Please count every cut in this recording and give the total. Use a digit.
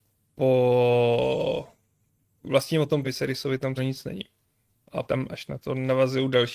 3